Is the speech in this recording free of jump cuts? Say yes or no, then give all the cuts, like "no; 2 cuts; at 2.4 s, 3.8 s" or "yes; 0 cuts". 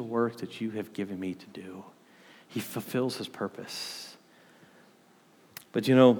yes; 0 cuts